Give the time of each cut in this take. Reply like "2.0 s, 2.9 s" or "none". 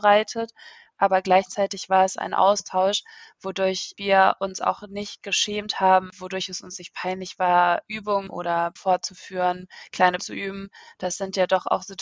6.1 s, 8.8 s, 10.2 s